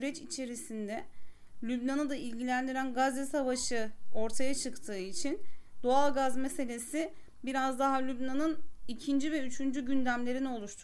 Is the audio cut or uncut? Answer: uncut